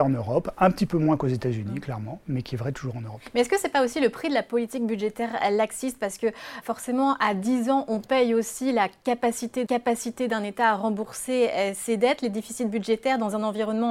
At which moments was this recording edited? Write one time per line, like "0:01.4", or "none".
0:06.6
0:09.7